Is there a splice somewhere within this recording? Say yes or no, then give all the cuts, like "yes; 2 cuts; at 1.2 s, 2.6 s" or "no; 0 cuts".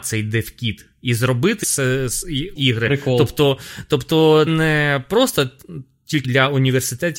yes; 4 cuts; at 1.6 s, 2.6 s, 4.5 s, 6.2 s